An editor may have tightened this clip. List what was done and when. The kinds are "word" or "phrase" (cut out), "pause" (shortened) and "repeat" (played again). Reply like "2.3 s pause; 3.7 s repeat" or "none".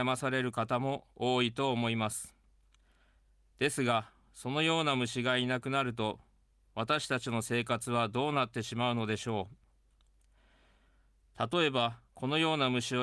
12.1 s pause